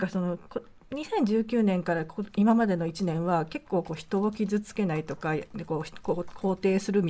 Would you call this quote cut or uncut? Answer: uncut